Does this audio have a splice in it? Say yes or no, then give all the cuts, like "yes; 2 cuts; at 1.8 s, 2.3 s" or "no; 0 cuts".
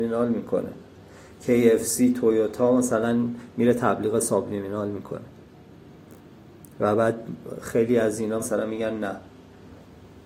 yes; 1 cut; at 8.4 s